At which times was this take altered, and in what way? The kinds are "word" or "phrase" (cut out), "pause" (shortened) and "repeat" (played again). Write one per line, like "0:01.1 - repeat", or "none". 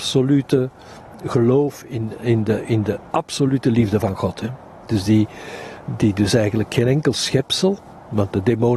0:03.1 - pause